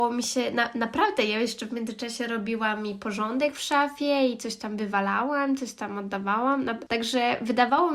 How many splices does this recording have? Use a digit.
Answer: 0